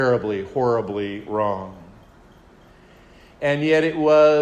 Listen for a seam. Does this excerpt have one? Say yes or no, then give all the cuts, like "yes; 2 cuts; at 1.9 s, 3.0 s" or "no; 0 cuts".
no; 0 cuts